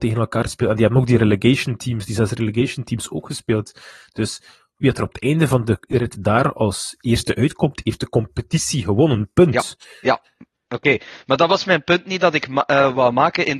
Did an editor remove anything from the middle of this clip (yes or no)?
no